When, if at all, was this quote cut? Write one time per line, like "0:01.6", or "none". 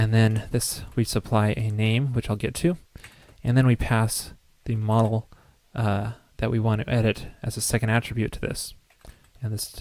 none

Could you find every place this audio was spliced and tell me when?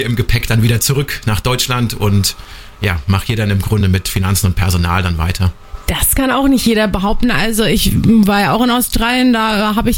none

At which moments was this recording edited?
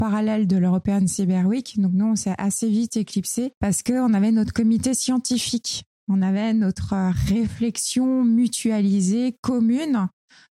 0:03.6

